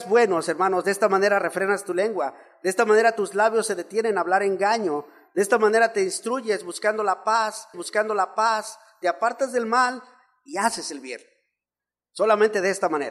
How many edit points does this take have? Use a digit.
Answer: 1